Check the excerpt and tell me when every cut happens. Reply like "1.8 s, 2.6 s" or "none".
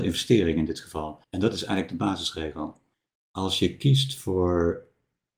1.2 s, 2.9 s